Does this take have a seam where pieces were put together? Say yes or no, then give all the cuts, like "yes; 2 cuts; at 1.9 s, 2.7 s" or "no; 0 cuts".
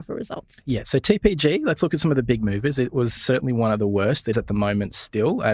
yes; 2 cuts; at 3.2 s, 4.3 s